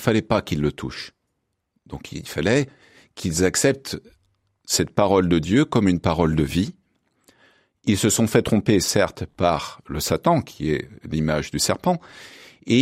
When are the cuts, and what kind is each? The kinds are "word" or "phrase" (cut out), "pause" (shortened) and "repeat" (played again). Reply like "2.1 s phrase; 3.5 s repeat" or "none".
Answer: none